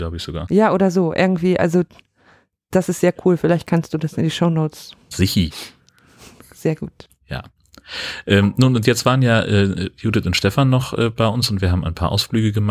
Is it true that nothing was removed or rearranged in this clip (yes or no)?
yes